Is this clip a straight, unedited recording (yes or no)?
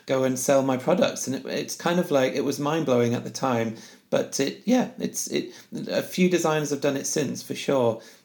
yes